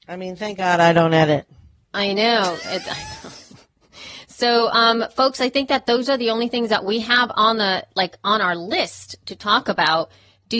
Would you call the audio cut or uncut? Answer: uncut